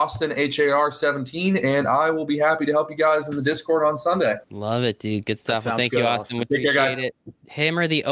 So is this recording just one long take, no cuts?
no; 2 cuts; at 4.4 s, 6.4 s

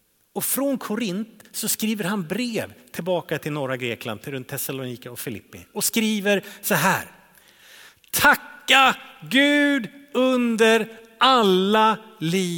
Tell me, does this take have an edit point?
no; 0 cuts

